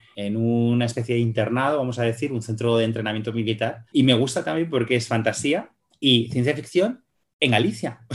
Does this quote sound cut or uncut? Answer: uncut